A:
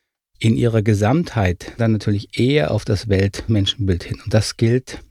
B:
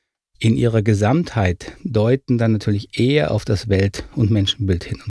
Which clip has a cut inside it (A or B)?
A